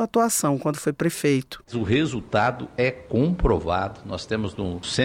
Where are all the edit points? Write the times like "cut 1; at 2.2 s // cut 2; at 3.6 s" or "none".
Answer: none